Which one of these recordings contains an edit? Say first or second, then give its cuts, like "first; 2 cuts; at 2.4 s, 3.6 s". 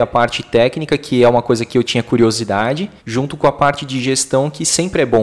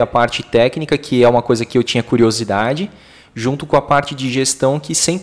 first; 1 cut; at 3.0 s